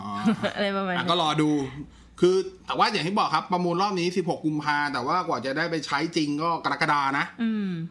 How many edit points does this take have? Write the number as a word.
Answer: one